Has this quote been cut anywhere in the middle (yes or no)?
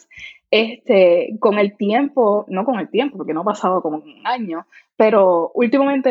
no